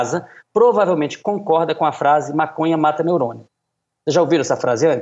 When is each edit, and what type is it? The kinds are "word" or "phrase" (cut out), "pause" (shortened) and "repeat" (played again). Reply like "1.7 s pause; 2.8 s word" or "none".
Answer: none

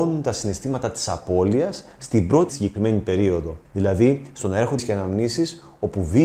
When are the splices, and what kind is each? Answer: 2.5 s phrase; 3.7 s pause; 4.8 s word

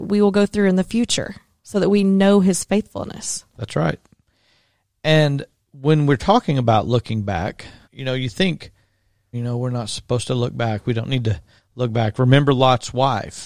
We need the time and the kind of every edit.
7.8 s word; 9.3 s word

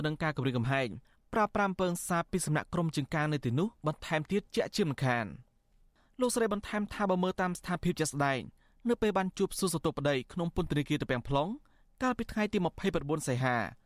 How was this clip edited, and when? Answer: none

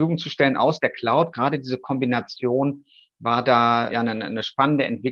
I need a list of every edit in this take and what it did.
3.9 s word

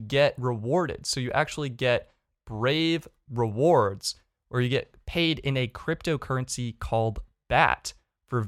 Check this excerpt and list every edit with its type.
none

